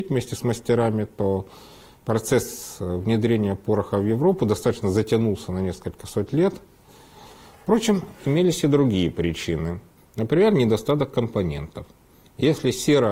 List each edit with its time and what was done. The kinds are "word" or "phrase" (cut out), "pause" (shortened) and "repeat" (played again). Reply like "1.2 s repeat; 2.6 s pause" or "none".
none